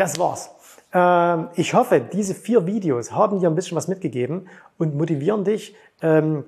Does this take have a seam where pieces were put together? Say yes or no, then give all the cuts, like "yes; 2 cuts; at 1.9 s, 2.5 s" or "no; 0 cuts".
no; 0 cuts